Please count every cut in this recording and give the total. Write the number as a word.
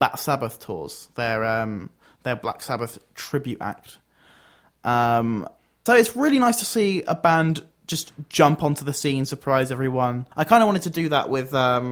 two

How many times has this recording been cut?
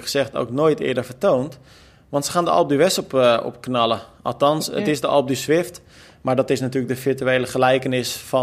zero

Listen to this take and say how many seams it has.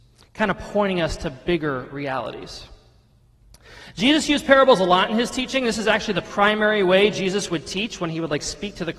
zero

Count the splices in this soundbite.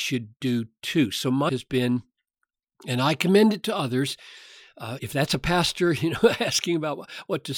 two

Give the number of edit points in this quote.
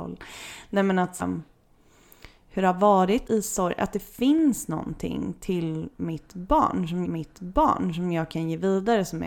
three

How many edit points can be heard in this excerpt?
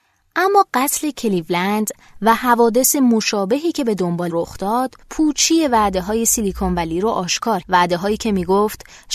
three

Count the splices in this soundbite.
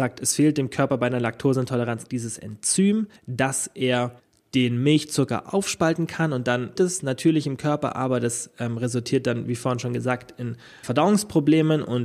five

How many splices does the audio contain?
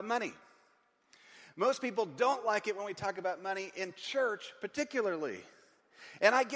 zero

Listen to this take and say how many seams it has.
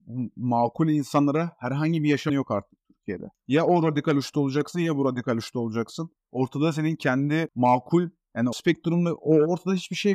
two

